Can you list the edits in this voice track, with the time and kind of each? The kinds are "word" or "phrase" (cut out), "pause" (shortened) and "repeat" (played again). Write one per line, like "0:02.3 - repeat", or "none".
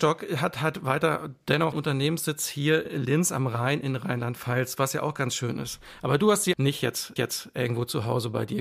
0:01.7 - word
0:02.9 - word
0:06.5 - word
0:07.2 - repeat